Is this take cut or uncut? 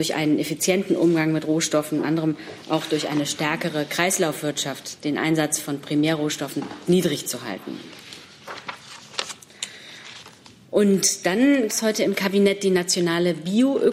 cut